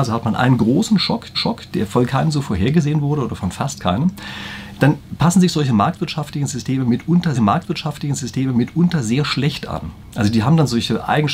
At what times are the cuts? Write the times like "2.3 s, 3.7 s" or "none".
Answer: 1.3 s, 7.3 s

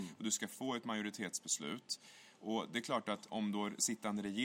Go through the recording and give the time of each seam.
3.3 s

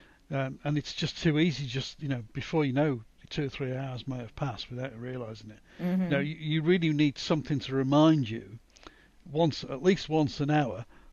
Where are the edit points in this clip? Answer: 3.3 s

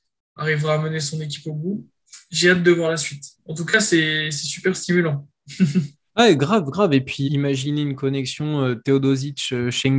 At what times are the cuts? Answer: 3.3 s, 6.1 s, 7.2 s

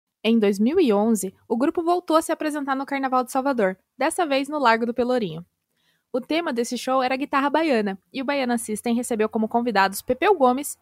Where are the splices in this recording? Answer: none

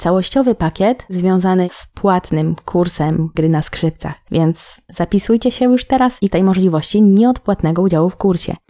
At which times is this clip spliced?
3.3 s, 6.3 s

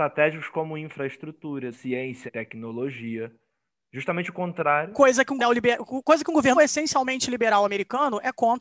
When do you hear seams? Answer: 1.7 s, 2.3 s, 5.4 s, 6.5 s

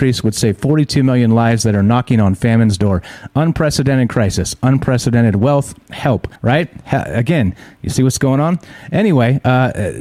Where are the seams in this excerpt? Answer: 6.4 s

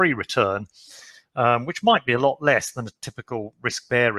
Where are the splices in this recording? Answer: none

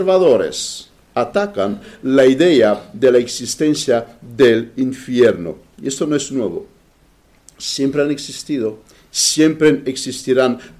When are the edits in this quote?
none

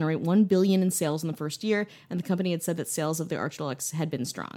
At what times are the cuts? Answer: none

